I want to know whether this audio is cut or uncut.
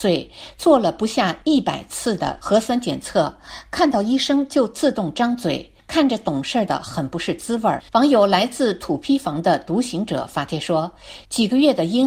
cut